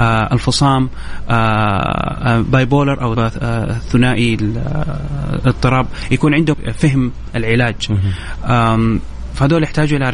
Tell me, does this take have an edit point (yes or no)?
yes